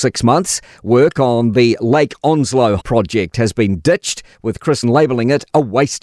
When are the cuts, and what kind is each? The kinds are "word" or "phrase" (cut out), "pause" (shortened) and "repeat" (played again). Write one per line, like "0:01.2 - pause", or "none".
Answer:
0:02.8 - word
0:04.8 - word